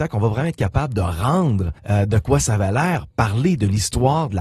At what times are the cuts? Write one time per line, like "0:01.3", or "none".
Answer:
0:01.8